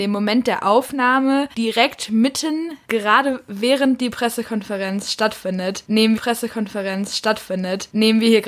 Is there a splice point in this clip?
yes; 2 cuts; at 2.8 s, 6.2 s

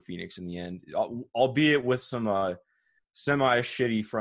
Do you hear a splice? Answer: no; 0 cuts

